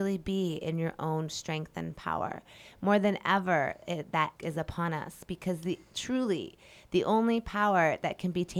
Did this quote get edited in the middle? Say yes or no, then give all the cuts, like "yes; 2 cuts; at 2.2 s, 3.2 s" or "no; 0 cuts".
yes; 1 cut; at 4.4 s